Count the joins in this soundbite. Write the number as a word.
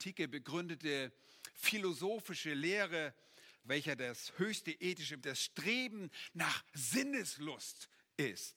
two